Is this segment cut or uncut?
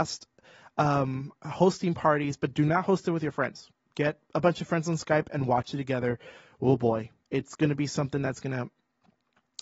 uncut